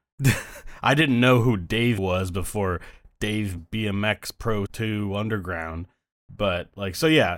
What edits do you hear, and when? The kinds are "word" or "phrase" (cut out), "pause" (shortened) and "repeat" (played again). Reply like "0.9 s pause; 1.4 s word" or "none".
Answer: 2.0 s word; 3.6 s word; 4.7 s word

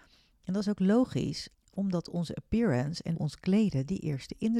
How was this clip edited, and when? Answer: 1.5 s pause; 3.1 s word

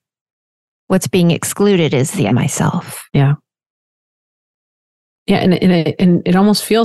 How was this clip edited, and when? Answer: 2.3 s word; 3.1 s pause

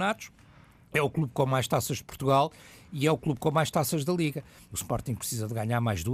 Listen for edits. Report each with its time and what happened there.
none

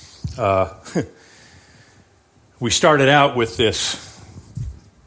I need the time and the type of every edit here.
none

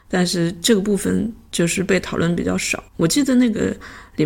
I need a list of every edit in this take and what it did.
2.9 s pause

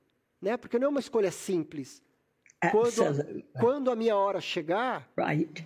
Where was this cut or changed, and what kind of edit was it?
none

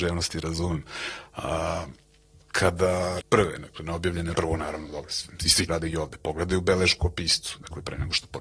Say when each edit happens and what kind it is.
3.2 s word; 4.3 s word; 5.7 s word

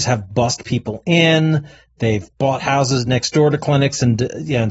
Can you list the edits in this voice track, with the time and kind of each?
none

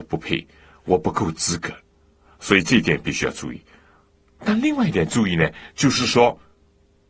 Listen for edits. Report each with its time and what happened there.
1.9 s pause

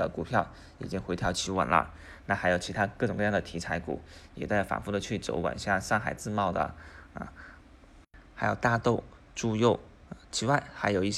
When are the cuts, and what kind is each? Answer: 10.2 s pause

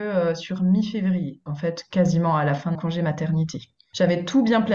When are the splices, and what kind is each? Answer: 1.5 s word; 2.7 s word

